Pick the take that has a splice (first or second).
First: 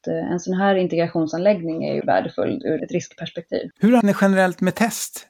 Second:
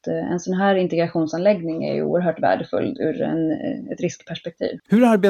first